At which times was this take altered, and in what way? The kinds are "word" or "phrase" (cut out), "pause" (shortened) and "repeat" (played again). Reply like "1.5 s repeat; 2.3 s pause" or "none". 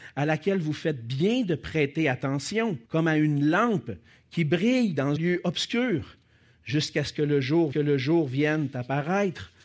2.9 s pause; 5.2 s word; 7.7 s repeat